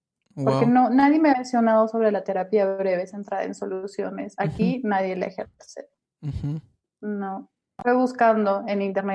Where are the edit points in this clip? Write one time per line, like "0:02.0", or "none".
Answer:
0:01.3